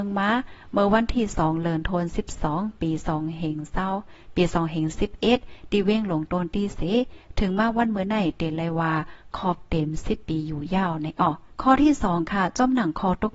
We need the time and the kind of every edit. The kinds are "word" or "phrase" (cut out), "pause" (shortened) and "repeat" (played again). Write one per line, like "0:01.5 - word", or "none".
0:11.5 - pause